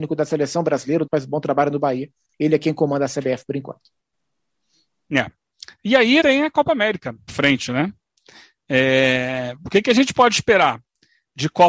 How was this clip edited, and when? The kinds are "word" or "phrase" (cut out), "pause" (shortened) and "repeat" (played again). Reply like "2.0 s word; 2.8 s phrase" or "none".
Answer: 1.1 s word; 6.2 s phrase; 7.3 s word